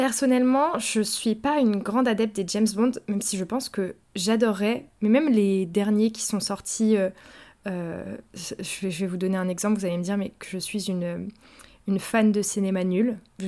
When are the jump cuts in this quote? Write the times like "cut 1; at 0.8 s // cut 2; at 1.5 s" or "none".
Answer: none